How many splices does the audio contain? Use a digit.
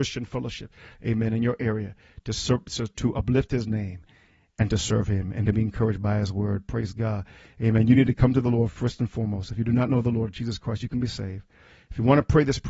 0